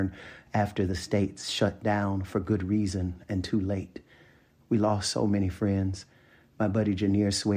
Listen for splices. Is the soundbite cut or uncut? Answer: uncut